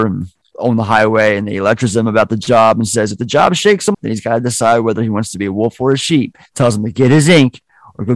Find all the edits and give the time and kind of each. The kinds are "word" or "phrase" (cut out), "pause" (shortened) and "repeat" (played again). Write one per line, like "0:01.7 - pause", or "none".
0:03.9 - word
0:06.5 - pause